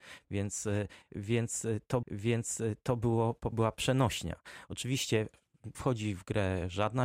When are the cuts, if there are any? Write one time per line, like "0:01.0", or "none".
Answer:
0:02.0
0:03.5
0:05.7